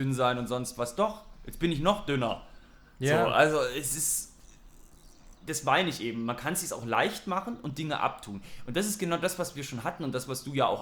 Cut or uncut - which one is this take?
uncut